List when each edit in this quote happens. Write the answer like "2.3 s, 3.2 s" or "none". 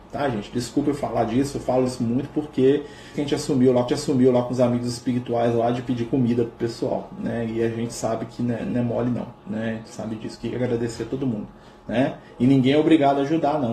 3.1 s, 3.9 s, 9.4 s